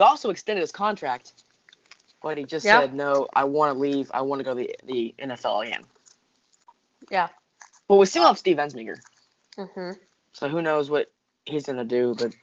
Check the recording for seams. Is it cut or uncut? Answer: uncut